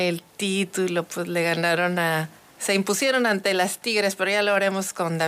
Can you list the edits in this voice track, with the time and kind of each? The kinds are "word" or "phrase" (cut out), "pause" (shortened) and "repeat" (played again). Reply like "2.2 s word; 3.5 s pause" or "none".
2.4 s pause